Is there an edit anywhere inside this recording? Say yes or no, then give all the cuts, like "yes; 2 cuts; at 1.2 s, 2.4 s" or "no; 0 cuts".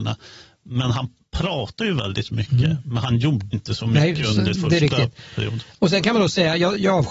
yes; 2 cuts; at 3.5 s, 4.6 s